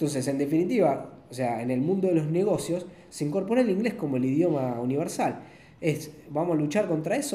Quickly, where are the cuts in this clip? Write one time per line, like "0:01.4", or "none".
none